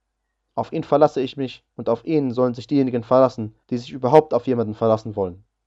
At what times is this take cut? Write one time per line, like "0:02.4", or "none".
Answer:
0:01.7
0:03.6